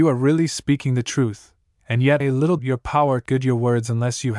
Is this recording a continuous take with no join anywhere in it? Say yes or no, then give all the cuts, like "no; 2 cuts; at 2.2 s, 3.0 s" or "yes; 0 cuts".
no; 3 cuts; at 2.2 s, 2.6 s, 3.3 s